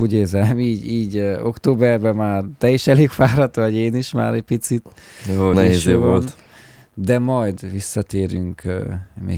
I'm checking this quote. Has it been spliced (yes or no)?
yes